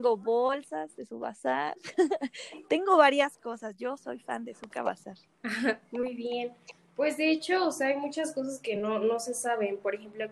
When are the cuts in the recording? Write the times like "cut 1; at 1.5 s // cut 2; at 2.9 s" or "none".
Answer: none